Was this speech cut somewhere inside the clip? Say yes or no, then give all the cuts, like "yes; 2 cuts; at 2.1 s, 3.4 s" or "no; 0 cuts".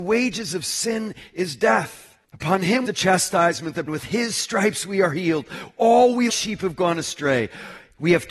yes; 4 cuts; at 2.2 s, 2.8 s, 3.9 s, 6.3 s